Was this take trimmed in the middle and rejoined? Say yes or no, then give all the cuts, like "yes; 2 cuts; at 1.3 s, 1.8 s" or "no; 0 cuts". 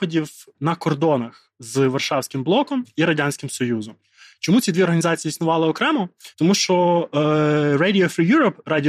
no; 0 cuts